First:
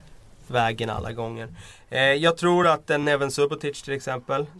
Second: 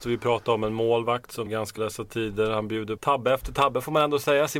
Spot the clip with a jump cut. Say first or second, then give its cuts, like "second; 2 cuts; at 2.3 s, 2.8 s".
second; 3 cuts; at 1.5 s, 1.8 s, 3.0 s